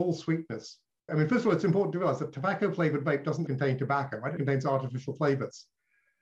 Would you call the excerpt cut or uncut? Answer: cut